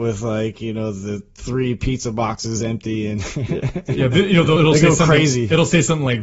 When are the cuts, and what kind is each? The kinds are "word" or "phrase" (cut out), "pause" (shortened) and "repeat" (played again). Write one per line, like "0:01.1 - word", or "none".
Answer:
0:04.6 - word